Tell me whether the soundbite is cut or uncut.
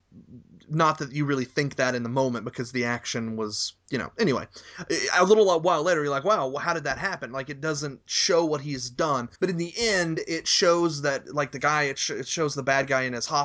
cut